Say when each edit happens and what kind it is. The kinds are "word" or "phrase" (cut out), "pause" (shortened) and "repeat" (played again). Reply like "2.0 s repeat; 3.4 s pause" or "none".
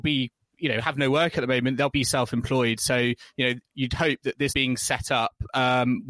1.9 s word; 4.5 s phrase